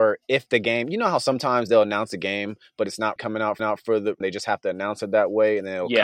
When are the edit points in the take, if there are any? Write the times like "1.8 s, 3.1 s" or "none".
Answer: 3.2 s, 3.6 s, 4.2 s